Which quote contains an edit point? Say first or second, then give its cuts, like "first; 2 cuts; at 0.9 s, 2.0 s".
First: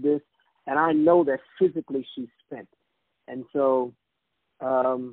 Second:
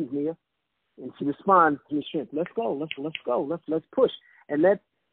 second; 4 cuts; at 1.2 s, 1.9 s, 3.0 s, 3.7 s